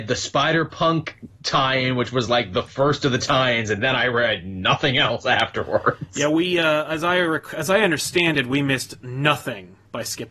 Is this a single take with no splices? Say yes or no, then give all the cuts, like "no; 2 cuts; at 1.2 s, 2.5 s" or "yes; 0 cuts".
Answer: yes; 0 cuts